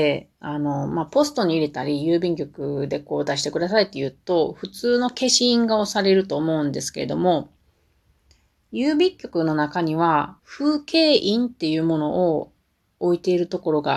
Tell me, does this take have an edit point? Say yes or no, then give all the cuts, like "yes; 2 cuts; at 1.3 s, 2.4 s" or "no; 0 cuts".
yes; 1 cut; at 10.4 s